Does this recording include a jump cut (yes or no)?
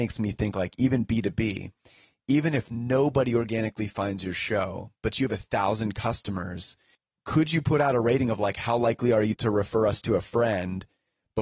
yes